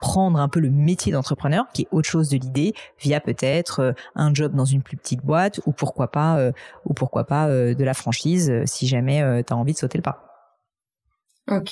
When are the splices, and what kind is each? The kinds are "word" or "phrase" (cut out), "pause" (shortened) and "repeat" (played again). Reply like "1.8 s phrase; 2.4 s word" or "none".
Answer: none